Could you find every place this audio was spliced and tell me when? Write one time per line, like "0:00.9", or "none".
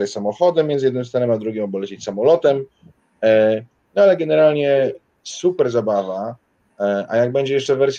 none